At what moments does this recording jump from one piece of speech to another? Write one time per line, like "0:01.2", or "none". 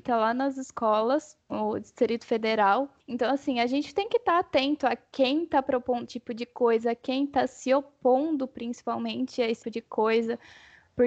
0:01.5
0:03.0
0:06.0
0:09.6